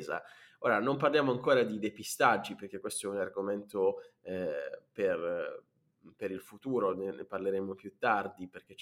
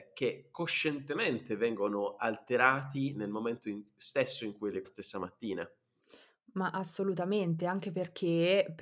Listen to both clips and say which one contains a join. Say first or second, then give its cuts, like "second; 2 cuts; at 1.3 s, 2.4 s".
second; 1 cut; at 4.8 s